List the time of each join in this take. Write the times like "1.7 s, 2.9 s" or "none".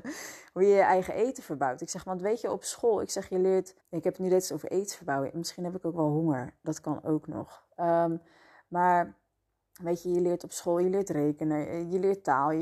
3.8 s